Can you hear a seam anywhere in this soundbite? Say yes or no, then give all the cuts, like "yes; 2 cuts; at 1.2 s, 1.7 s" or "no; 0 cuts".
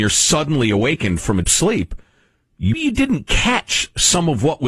yes; 2 cuts; at 1.4 s, 2.7 s